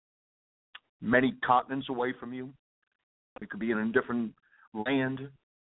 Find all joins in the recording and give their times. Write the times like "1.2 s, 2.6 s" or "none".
none